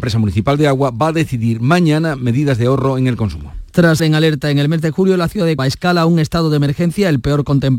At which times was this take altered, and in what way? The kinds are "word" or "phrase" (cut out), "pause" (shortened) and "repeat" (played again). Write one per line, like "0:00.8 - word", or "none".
0:04.0 - word
0:05.6 - word